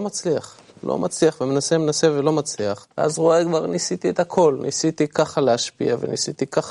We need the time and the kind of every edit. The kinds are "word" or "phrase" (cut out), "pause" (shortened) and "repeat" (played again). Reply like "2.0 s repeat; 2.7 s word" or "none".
2.9 s pause